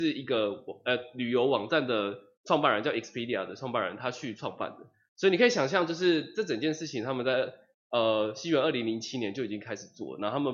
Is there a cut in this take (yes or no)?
no